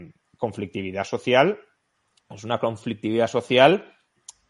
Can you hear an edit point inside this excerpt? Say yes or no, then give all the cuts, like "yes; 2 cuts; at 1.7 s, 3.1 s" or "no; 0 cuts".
no; 0 cuts